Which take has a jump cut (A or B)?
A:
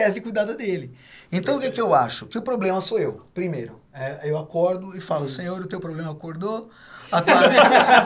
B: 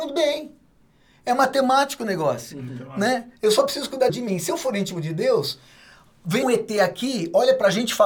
B